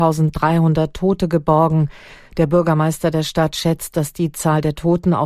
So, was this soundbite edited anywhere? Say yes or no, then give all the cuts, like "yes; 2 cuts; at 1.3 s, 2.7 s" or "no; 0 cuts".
no; 0 cuts